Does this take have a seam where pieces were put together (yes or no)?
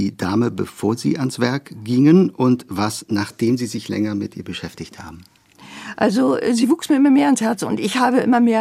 no